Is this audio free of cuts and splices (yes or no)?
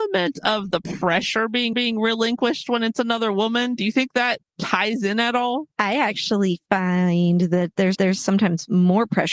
no